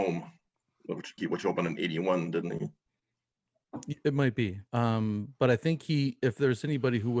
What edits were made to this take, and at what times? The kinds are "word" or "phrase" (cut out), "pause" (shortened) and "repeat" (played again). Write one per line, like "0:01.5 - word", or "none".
0:01.2 - phrase
0:04.7 - pause